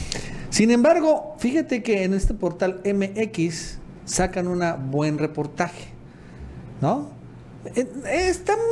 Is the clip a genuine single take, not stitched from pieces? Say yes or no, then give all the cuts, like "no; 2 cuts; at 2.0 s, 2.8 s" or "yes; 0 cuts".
yes; 0 cuts